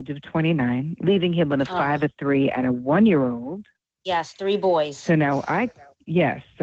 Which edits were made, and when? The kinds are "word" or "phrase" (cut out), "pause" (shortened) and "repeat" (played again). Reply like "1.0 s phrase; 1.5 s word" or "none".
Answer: none